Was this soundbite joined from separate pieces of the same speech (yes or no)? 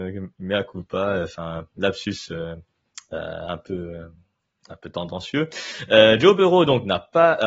no